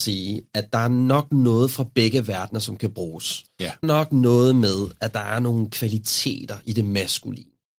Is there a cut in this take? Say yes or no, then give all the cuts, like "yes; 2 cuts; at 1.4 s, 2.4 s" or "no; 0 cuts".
yes; 1 cut; at 3.8 s